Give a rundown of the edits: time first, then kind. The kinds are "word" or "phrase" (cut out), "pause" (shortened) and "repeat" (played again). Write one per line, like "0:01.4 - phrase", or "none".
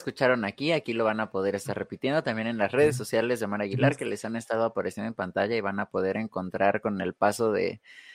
none